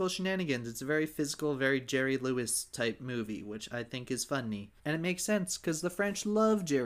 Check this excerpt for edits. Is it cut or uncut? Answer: cut